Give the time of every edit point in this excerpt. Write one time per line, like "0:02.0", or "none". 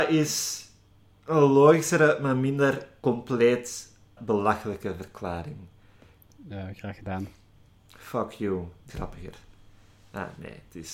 0:04.2
0:07.7
0:08.9

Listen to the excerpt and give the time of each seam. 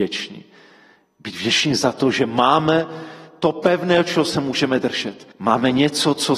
0:05.3

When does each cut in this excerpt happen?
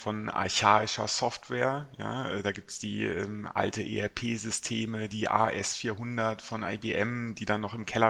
none

